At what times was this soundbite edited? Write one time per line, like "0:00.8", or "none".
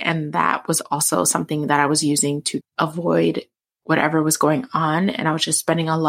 0:02.6